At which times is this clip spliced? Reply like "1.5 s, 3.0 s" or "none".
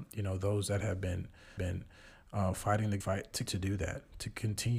1.6 s, 3.0 s, 3.5 s